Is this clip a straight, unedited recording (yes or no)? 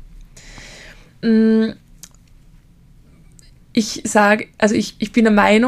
yes